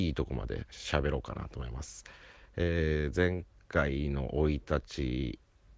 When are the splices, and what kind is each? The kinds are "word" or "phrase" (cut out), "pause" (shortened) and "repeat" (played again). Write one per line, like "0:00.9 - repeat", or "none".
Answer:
none